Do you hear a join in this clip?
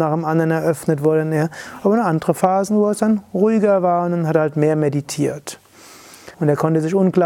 yes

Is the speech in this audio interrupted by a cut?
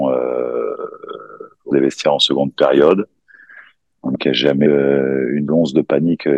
yes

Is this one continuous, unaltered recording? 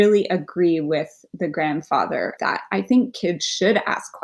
no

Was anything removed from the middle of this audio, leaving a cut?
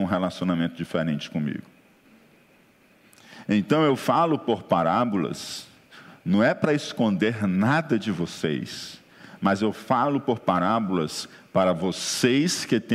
no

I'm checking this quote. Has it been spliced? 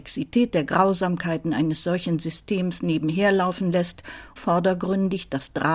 yes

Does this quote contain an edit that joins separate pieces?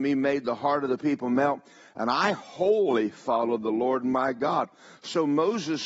no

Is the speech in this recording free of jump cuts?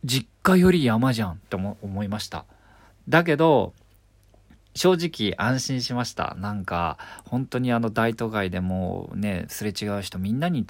yes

